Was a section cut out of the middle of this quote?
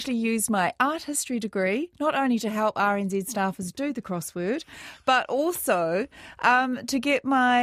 no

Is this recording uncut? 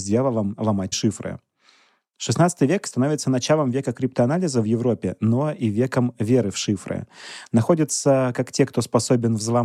no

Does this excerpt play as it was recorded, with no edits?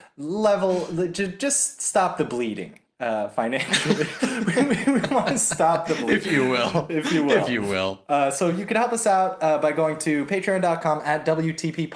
yes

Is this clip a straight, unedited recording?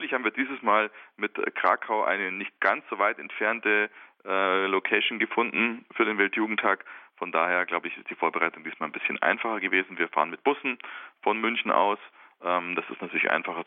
yes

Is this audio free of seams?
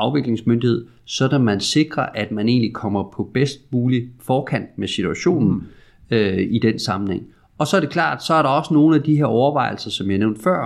yes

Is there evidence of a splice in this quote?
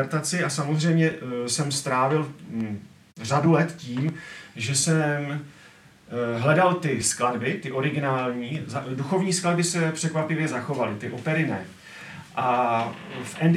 no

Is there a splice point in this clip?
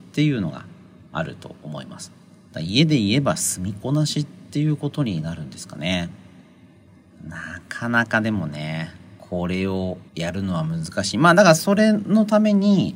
yes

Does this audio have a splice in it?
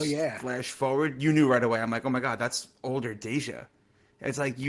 no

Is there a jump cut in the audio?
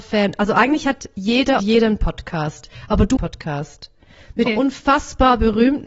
yes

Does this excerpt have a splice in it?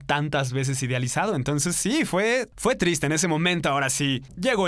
no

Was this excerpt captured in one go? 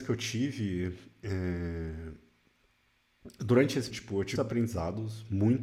no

